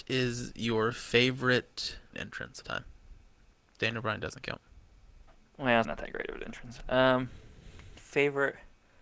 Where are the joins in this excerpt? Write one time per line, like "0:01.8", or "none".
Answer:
0:02.1
0:02.6
0:05.8